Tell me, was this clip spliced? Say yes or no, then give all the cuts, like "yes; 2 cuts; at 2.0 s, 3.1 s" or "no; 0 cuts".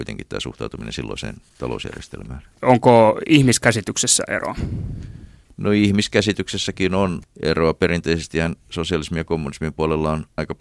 yes; 1 cut; at 2.5 s